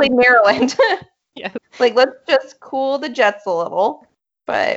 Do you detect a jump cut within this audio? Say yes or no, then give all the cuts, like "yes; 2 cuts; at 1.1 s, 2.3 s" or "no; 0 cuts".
yes; 1 cut; at 1.6 s